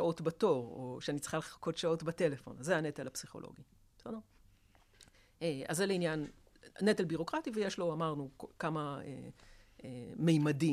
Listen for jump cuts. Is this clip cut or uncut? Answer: uncut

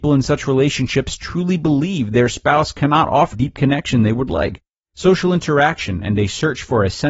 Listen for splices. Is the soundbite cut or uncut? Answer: cut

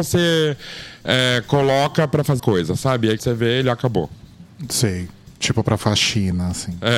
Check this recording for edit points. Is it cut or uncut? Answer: cut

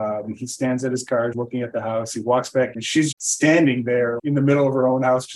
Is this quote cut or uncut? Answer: cut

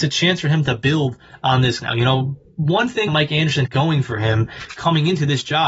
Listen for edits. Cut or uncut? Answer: cut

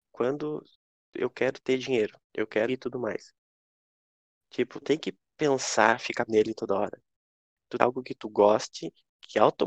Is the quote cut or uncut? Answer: cut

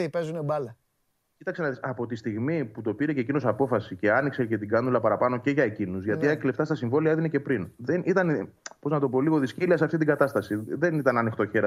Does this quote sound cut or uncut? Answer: uncut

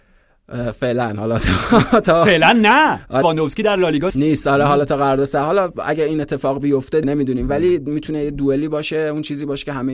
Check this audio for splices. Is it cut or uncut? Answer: cut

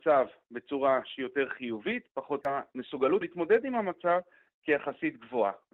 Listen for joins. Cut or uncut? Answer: cut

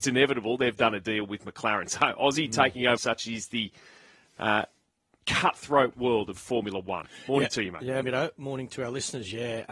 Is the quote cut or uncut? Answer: cut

